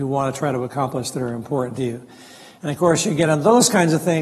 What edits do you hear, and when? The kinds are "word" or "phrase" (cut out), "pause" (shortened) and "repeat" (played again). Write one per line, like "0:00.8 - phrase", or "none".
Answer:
none